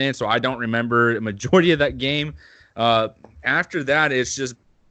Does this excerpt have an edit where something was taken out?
no; 0 cuts

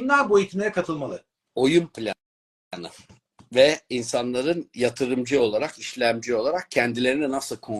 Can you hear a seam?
no; 0 cuts

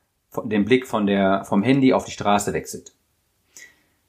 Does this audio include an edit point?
no; 0 cuts

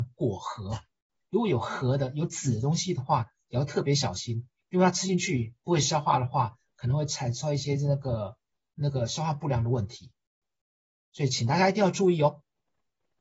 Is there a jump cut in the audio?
no; 0 cuts

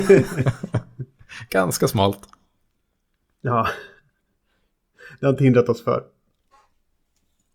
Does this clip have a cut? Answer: no; 0 cuts

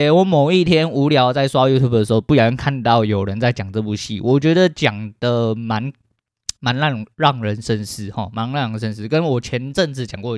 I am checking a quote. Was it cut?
yes; 1 cut; at 6.6 s

